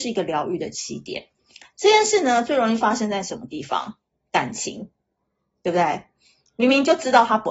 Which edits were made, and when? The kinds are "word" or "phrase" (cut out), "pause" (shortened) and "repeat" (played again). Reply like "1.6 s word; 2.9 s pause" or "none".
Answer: none